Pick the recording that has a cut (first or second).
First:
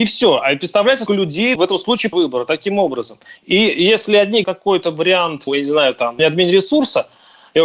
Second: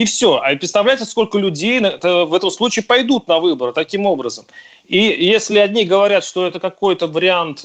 first